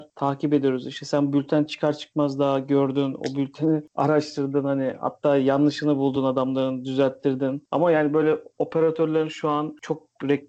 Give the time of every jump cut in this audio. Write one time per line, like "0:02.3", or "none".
none